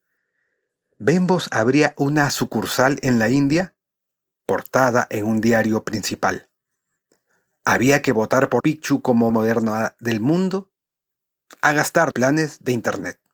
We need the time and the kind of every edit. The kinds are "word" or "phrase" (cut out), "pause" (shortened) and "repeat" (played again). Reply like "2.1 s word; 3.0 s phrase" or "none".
8.6 s word; 9.3 s word; 12.1 s word